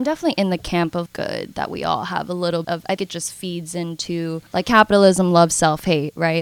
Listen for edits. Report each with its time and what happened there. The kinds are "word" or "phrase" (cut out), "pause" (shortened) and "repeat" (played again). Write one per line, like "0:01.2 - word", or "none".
0:01.1 - phrase
0:02.6 - word
0:03.0 - word
0:04.5 - pause